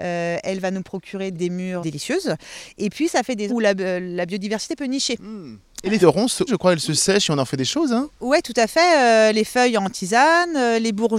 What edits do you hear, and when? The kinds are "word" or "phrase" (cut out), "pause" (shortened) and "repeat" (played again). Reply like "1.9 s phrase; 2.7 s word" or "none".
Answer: 1.3 s word; 1.8 s word; 3.5 s word; 6.0 s word; 6.5 s word